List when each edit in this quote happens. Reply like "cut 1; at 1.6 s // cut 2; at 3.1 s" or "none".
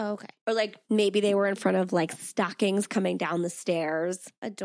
none